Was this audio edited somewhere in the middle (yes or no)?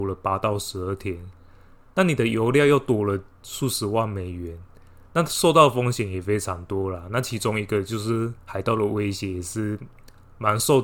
yes